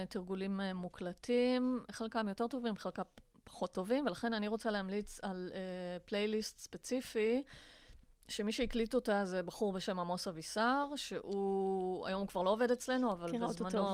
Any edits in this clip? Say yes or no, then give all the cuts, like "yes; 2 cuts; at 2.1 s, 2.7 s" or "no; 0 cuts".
no; 0 cuts